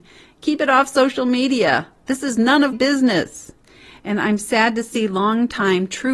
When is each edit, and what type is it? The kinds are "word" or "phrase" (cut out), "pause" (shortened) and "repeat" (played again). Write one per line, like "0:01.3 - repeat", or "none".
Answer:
0:02.7 - word